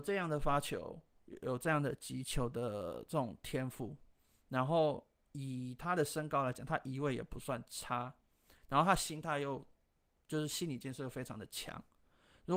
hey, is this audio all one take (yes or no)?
yes